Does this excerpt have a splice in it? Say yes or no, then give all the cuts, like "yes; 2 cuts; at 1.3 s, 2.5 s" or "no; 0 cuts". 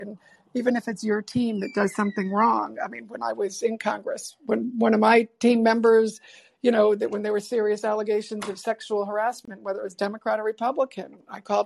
no; 0 cuts